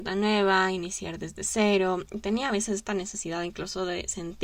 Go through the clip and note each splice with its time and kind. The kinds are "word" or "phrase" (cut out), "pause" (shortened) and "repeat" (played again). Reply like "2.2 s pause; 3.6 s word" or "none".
none